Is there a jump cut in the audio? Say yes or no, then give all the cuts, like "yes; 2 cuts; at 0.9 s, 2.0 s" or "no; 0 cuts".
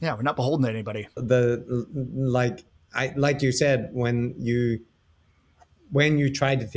no; 0 cuts